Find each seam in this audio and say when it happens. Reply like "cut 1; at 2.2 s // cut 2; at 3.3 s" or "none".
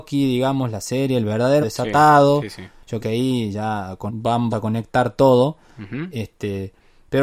cut 1; at 1.6 s // cut 2; at 3.0 s // cut 3; at 4.1 s // cut 4; at 4.5 s